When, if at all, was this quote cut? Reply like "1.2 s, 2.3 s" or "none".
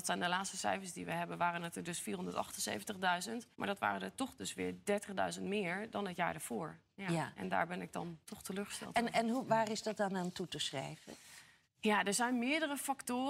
3.5 s, 8.2 s, 11.6 s